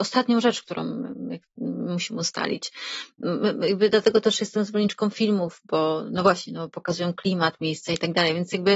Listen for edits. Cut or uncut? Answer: uncut